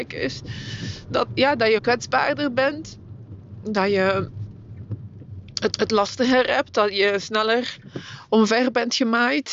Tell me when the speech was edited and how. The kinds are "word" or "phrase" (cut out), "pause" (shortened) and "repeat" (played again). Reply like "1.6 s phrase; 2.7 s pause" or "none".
1.3 s word; 1.8 s word; 5.7 s repeat